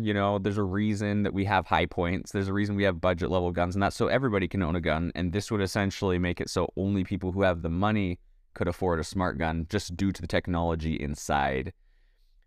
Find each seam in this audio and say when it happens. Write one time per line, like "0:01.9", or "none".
none